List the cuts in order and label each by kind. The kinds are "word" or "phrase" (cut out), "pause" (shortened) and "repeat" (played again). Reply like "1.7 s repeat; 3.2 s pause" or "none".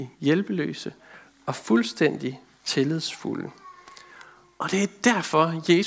none